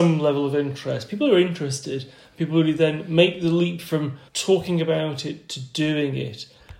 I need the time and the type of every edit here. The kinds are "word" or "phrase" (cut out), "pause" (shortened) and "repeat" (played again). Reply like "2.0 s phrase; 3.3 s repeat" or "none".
4.3 s pause